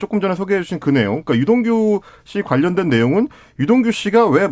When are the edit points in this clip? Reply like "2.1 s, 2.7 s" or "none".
none